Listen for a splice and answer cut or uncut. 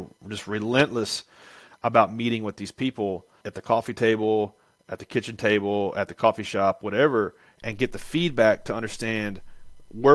uncut